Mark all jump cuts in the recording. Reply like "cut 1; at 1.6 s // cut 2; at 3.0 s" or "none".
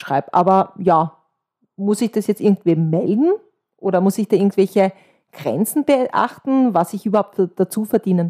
none